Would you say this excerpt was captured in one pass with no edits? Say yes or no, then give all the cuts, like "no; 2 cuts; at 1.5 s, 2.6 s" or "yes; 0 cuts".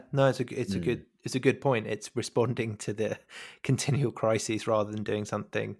yes; 0 cuts